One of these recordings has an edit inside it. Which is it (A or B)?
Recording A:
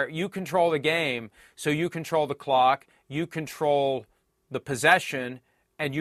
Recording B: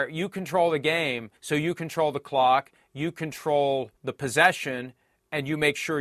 B